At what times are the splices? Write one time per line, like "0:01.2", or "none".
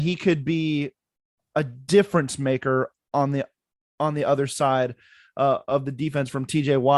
none